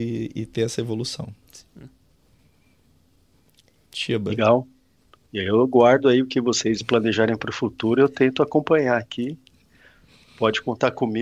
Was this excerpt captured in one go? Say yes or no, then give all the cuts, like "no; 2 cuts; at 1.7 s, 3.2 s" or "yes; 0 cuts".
yes; 0 cuts